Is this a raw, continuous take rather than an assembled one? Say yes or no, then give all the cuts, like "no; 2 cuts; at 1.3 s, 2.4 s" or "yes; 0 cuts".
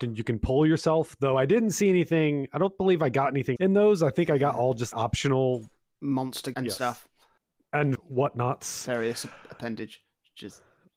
no; 4 cuts; at 3.6 s, 4.9 s, 6.5 s, 7.9 s